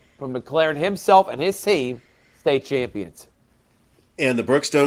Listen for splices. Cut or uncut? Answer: uncut